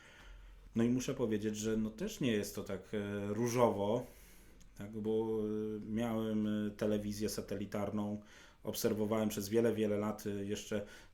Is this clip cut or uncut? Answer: uncut